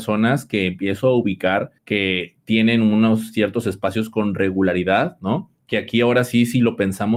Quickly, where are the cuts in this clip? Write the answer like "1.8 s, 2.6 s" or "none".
1.8 s